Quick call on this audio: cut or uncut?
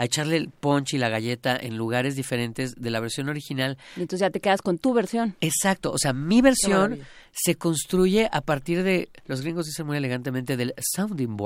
uncut